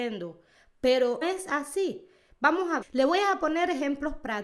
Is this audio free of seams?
no; 2 cuts; at 1.2 s, 2.8 s

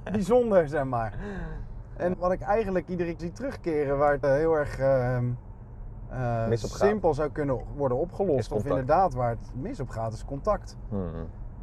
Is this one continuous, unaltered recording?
no; 3 cuts; at 2.1 s, 3.2 s, 4.2 s

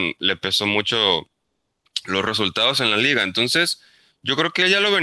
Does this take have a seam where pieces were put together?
no; 0 cuts

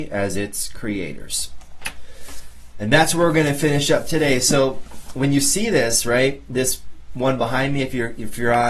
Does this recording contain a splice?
no; 0 cuts

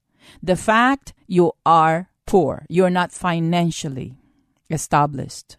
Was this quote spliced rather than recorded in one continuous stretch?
yes; 2 cuts; at 1.2 s, 2.2 s

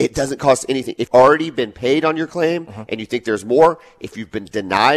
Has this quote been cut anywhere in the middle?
yes; 1 cut; at 1.1 s

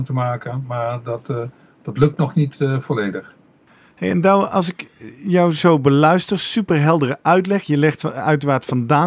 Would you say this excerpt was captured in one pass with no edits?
yes; 0 cuts

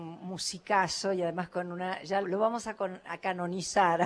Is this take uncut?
no; 1 cut; at 2.2 s

